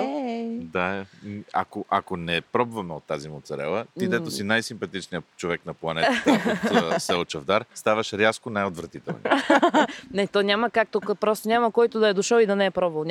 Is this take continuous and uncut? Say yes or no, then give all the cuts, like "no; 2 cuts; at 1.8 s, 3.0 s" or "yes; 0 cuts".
no; 1 cut; at 7.7 s